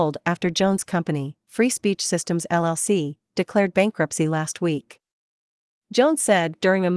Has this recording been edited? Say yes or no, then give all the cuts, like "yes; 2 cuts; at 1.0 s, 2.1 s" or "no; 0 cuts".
no; 0 cuts